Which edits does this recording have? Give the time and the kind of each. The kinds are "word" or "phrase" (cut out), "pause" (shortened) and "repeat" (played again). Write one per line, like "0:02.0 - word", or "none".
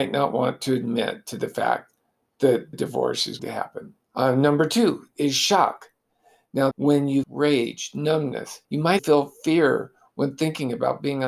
0:02.7 - word
0:03.4 - word
0:04.0 - pause
0:06.7 - phrase
0:07.2 - phrase
0:08.6 - pause
0:09.0 - word